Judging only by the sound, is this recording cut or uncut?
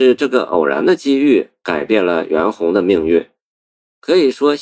uncut